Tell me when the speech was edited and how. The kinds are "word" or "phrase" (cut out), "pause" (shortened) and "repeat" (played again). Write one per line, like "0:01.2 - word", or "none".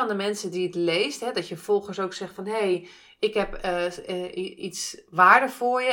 none